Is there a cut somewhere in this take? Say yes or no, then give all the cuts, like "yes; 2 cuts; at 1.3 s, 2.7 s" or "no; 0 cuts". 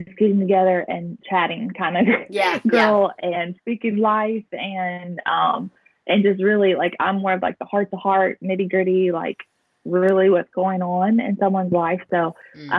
no; 0 cuts